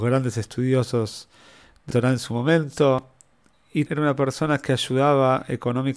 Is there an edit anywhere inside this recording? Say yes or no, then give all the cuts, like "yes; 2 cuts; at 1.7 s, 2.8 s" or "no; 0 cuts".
yes; 2 cuts; at 1.9 s, 3.9 s